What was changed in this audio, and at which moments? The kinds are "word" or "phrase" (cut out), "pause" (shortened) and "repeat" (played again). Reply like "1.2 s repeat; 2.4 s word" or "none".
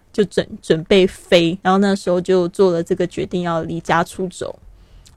1.6 s pause